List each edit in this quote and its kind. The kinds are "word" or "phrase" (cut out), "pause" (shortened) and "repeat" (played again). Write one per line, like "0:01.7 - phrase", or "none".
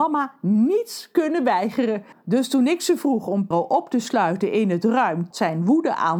0:03.5 - word
0:05.3 - word